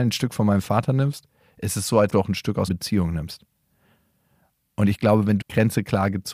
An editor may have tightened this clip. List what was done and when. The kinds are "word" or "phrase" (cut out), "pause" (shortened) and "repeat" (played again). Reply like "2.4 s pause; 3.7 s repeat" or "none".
2.1 s word; 2.7 s word; 5.4 s word